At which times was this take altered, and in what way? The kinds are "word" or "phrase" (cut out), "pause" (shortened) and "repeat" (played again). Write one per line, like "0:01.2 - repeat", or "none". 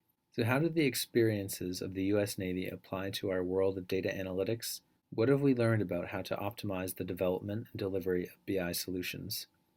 0:05.0 - pause